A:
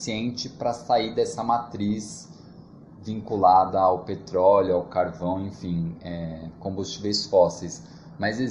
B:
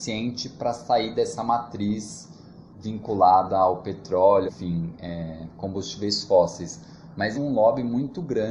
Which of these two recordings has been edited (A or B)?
B